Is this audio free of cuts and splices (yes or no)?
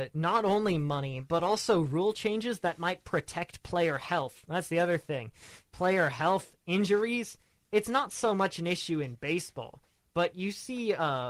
yes